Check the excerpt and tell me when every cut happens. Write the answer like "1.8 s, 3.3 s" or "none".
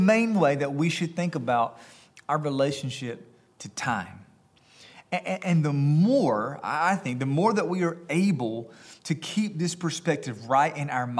none